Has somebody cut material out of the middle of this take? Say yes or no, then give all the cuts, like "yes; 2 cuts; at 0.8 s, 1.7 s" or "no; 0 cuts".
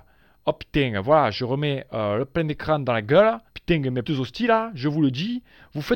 yes; 2 cuts; at 3.5 s, 4.0 s